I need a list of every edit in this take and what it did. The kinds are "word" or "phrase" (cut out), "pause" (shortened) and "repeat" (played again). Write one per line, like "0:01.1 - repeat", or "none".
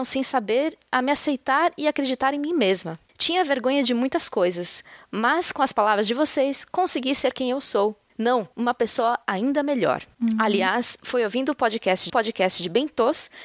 0:08.5 - pause
0:12.1 - repeat

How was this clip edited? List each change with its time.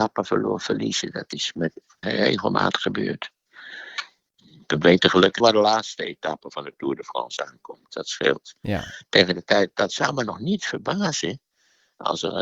0:02.0 - word
0:05.4 - word

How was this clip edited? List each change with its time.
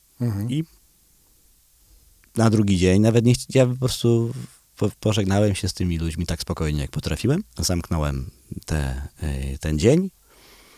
0:07.5 - pause

